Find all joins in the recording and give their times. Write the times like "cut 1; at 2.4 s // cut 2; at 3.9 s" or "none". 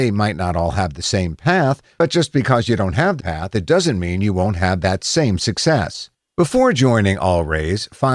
cut 1; at 3.2 s // cut 2; at 6.1 s